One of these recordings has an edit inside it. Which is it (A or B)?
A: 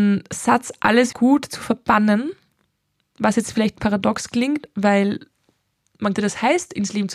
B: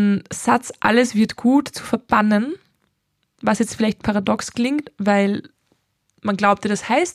A